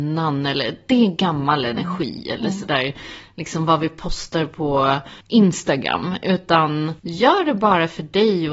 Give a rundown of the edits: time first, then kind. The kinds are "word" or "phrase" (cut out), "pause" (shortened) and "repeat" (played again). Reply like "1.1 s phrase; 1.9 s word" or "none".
5.2 s pause; 7.0 s pause